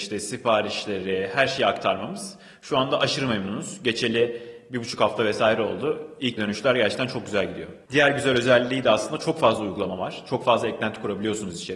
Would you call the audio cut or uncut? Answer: cut